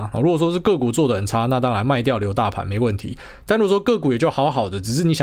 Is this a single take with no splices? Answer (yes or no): yes